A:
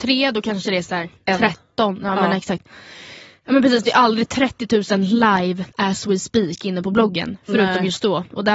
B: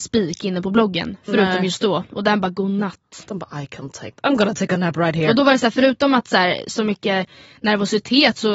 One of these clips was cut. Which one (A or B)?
A